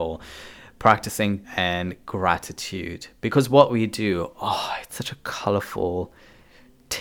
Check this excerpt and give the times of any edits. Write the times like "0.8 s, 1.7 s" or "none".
1.4 s, 4.9 s